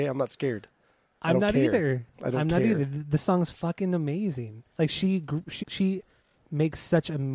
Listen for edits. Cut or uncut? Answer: cut